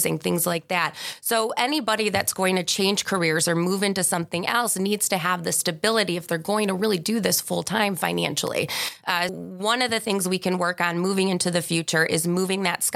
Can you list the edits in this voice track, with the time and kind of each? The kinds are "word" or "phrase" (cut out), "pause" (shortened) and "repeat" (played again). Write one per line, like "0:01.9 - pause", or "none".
0:09.3 - word